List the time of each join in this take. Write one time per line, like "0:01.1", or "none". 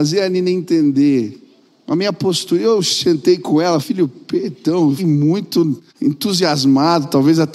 0:01.7
0:03.8
0:05.0
0:05.9

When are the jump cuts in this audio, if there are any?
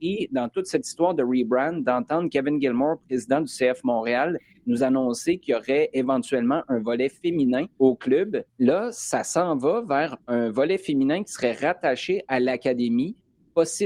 0:07.7
0:08.5

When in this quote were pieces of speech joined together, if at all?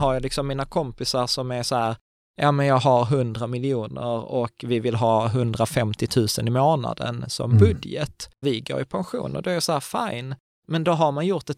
0:08.4

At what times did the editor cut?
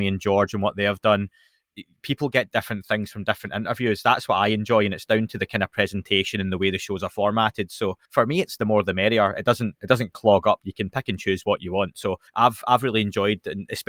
0:08.0
0:12.3

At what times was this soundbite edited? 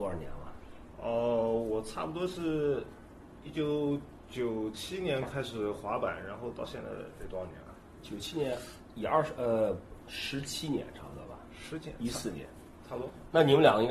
none

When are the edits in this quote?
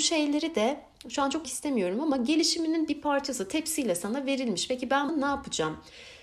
0:01.4
0:05.1

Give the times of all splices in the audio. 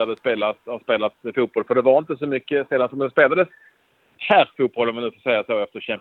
none

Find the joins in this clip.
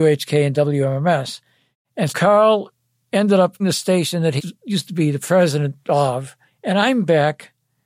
0:02.1
0:03.6
0:04.4

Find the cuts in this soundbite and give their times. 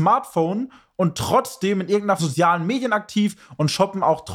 0:02.2

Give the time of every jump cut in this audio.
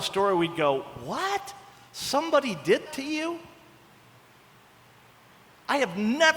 0:02.9

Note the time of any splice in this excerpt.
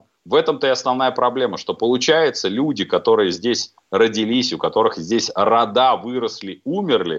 none

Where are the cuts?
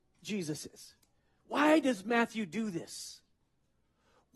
none

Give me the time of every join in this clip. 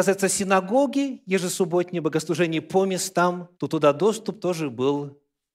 0:03.5

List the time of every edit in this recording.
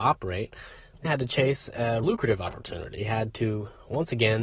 0:01.0
0:02.0
0:03.0

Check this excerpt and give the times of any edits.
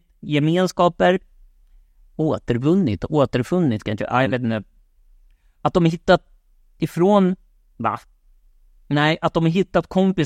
none

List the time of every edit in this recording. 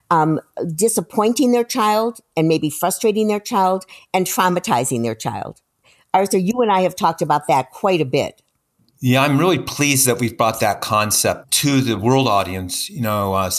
none

